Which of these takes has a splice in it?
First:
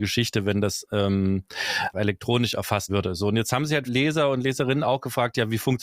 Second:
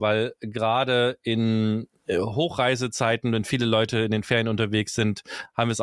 first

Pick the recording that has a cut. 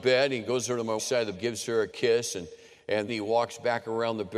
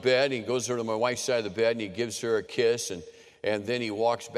first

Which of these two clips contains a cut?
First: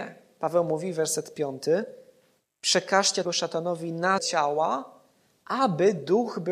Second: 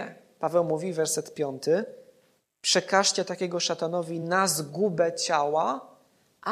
first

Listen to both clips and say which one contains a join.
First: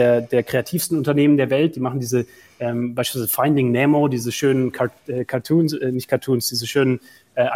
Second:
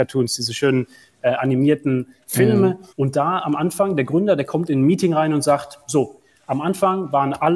second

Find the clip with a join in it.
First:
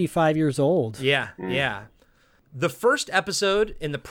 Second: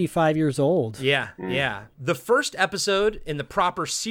second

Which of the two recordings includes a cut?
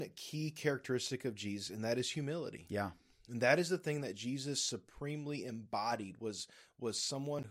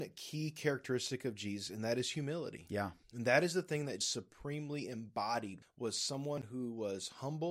second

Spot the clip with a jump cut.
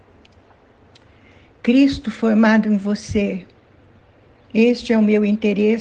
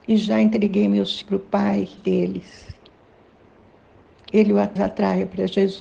second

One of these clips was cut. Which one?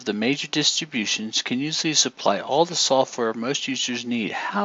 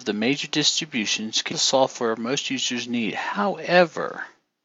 second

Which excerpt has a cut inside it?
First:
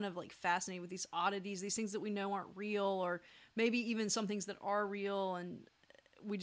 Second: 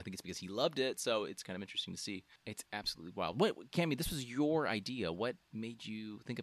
second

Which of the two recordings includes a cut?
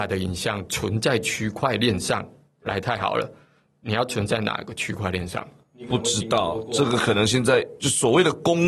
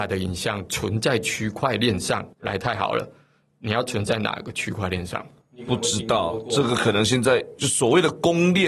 second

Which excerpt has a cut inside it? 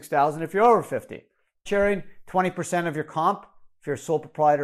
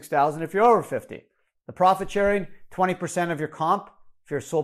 first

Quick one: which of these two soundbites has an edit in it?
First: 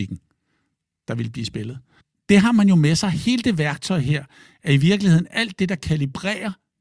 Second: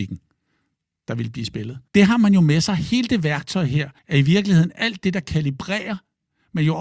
second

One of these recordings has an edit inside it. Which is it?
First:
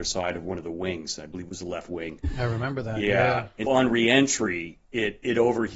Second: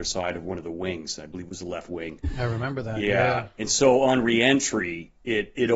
first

